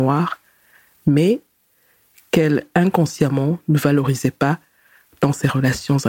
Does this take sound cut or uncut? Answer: uncut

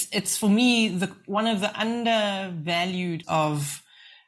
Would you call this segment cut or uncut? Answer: cut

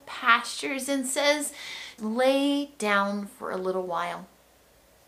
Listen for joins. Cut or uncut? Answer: cut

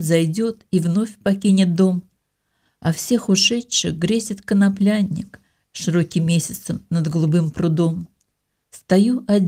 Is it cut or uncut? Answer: uncut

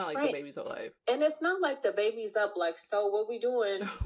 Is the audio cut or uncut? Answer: cut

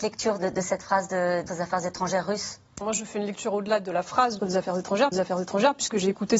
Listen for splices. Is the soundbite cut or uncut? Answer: cut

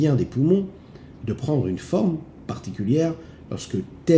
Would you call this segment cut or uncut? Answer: cut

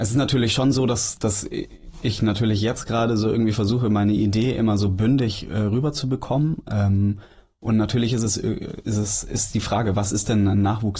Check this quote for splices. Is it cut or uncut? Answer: uncut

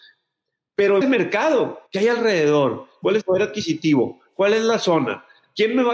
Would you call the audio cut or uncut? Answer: cut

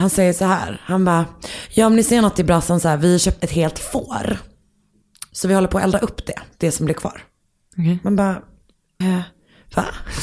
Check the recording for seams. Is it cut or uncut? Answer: cut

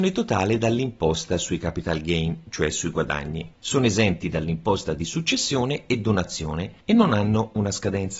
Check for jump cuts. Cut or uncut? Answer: cut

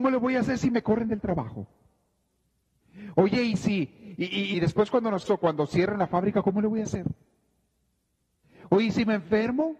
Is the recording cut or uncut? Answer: cut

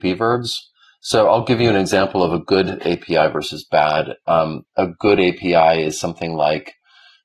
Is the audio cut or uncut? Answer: uncut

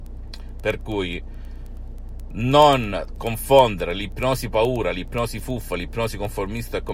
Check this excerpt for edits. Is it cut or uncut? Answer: uncut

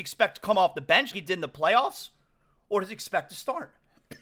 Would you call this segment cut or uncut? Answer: cut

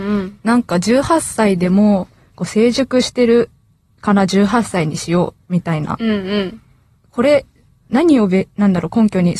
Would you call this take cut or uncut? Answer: uncut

